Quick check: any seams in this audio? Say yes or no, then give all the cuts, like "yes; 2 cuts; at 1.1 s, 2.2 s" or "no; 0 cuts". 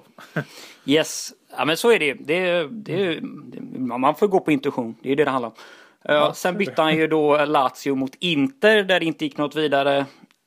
no; 0 cuts